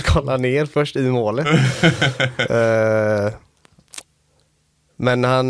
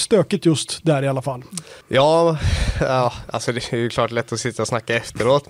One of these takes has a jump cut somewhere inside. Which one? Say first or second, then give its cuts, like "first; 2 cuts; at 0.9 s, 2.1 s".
second; 1 cut; at 1.8 s